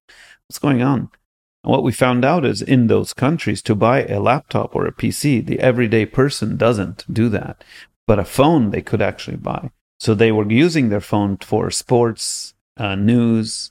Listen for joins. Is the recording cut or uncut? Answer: cut